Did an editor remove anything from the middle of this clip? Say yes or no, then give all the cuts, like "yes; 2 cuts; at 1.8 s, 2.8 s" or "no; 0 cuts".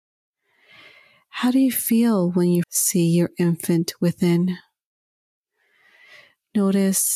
yes; 1 cut; at 2.6 s